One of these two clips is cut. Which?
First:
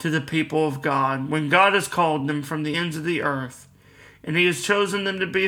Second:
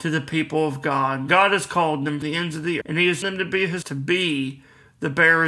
second; 5 cuts; at 1.3 s, 2.2 s, 2.8 s, 3.2 s, 3.8 s

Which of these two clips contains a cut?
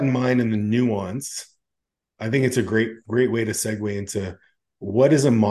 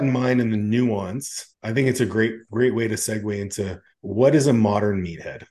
second; 2 cuts; at 1.5 s, 3.9 s

